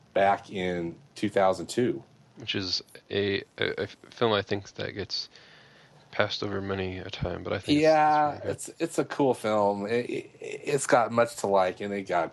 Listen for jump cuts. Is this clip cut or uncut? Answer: uncut